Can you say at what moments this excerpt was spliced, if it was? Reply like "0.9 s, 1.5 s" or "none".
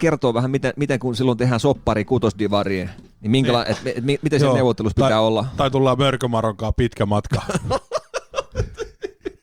none